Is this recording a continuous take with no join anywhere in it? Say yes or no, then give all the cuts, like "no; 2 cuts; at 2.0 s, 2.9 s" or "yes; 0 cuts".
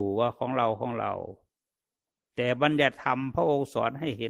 yes; 0 cuts